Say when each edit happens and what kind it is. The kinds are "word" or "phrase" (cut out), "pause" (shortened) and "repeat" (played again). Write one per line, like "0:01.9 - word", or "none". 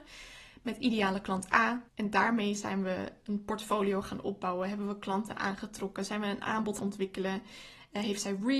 0:01.9 - pause
0:06.8 - word